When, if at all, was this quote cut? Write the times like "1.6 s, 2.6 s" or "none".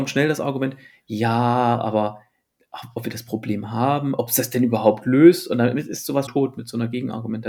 6.3 s

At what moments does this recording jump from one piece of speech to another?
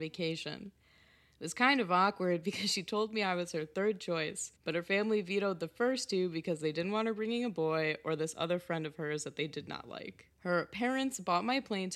4.6 s, 10.3 s

